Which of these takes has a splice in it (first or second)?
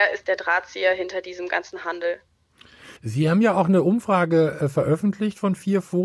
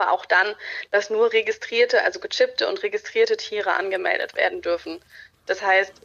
first